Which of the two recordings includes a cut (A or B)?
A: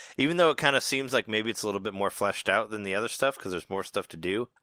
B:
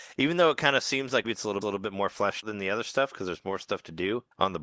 B